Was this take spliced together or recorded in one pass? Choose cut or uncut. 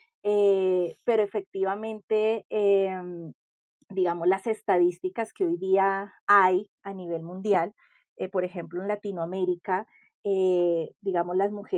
uncut